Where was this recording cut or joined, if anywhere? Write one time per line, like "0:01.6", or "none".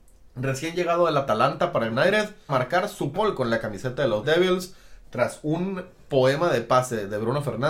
0:01.9
0:02.5
0:03.1
0:04.2